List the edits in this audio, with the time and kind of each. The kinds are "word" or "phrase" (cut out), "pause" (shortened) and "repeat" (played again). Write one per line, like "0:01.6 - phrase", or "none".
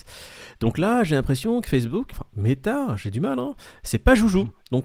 0:02.1 - word

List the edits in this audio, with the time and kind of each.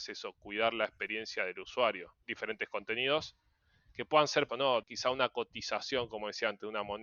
0:02.2 - word
0:04.5 - word
0:04.8 - word

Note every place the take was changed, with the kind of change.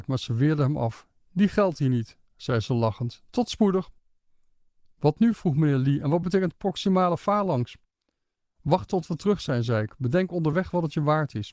none

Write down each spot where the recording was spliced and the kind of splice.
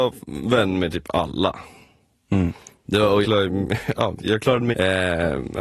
0:03.2 - word
0:04.2 - word
0:04.7 - word

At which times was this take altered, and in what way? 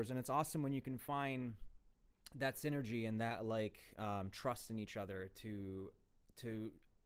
none

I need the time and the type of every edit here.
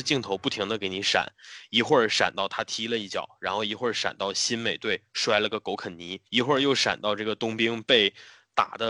0:06.3 - pause

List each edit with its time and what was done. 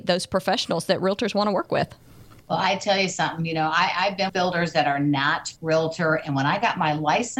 0:04.3 - word
0:05.6 - word

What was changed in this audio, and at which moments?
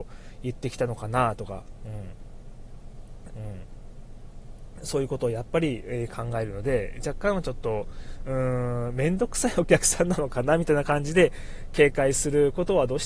0:03.3 - repeat

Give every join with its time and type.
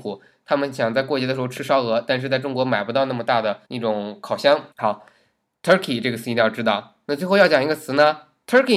0:03.6 - pause
0:04.7 - pause

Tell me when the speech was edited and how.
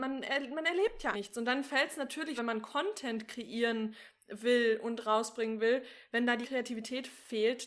0:01.1 - word
0:02.4 - word
0:06.4 - word

